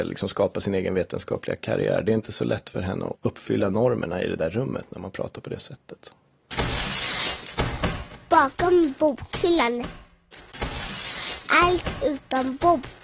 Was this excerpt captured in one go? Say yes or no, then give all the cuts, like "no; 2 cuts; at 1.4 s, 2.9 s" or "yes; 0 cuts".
no; 1 cut; at 3.1 s